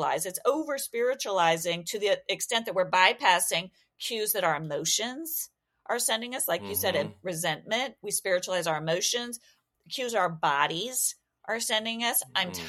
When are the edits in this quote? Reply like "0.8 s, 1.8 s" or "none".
none